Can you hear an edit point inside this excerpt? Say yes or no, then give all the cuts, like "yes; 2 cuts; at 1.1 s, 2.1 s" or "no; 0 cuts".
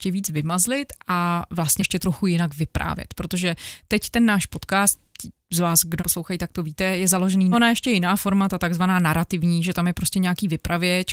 yes; 3 cuts; at 1.8 s, 6.0 s, 7.5 s